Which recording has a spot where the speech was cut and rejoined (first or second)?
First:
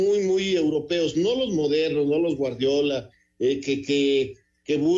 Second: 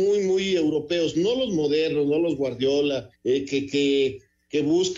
second